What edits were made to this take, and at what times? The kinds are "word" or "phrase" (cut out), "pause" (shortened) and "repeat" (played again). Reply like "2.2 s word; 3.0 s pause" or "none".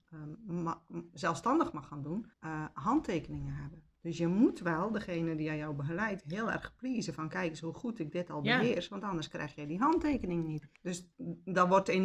2.3 s pause; 10.7 s pause